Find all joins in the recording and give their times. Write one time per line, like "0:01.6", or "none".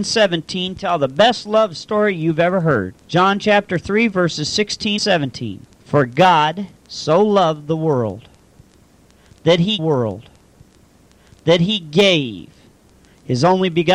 0:03.0
0:05.0
0:05.7
0:06.8
0:09.8